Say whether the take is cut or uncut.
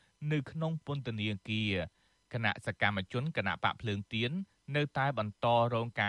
uncut